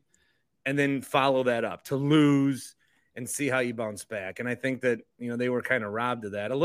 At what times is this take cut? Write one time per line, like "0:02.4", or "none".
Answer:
none